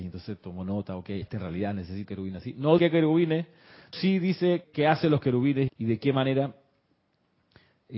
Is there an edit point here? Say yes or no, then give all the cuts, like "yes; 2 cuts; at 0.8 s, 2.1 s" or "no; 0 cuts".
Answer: yes; 6 cuts; at 1.2 s, 2.0 s, 2.8 s, 3.9 s, 4.6 s, 5.7 s